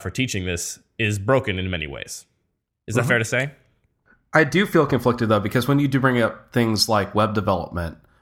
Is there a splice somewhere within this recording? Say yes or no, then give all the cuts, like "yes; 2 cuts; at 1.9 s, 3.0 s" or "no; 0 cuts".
no; 0 cuts